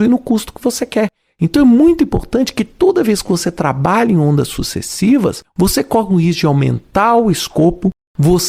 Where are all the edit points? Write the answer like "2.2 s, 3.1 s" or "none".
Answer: none